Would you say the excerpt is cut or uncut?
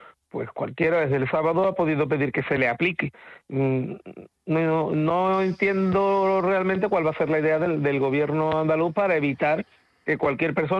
uncut